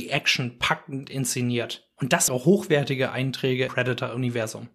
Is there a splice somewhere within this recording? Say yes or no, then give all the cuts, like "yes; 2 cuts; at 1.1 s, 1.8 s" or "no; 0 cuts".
yes; 2 cuts; at 2.3 s, 3.7 s